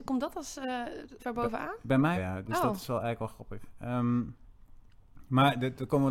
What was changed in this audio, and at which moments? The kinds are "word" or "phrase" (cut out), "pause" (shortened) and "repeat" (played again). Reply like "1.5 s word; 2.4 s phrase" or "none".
1.2 s word; 2.1 s word